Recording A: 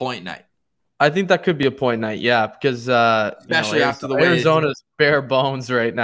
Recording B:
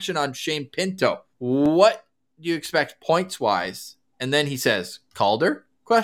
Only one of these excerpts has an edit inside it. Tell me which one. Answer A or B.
B